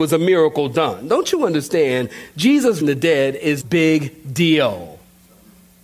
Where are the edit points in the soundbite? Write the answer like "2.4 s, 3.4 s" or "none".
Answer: 2.8 s, 3.6 s